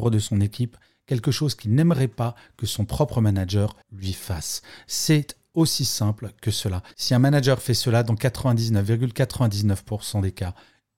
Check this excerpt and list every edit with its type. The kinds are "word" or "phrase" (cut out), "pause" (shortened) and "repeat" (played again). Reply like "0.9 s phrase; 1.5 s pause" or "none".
3.8 s pause; 6.9 s pause